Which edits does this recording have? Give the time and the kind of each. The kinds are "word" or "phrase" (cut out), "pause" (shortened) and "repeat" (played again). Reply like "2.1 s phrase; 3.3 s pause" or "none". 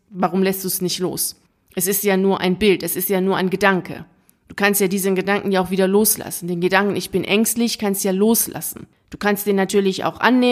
none